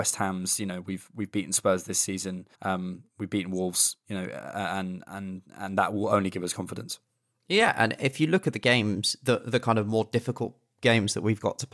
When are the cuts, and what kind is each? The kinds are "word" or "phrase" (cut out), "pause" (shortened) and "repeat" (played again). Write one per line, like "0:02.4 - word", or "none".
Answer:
0:02.5 - pause
0:07.1 - pause